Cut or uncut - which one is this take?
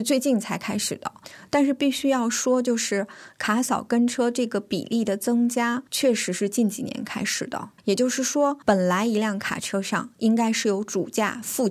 cut